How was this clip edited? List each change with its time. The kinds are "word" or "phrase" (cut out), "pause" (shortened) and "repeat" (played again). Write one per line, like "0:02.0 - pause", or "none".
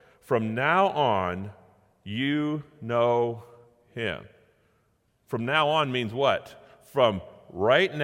none